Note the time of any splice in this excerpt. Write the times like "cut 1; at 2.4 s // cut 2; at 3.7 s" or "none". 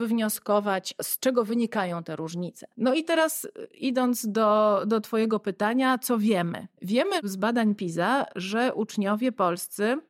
none